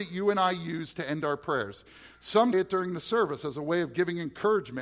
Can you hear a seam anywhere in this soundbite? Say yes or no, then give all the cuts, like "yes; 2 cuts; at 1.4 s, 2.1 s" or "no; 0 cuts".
yes; 1 cut; at 2.5 s